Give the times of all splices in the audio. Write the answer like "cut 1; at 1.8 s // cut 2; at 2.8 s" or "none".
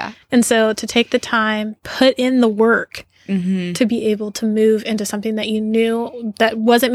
cut 1; at 1.8 s